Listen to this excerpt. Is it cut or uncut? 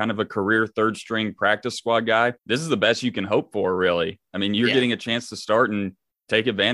cut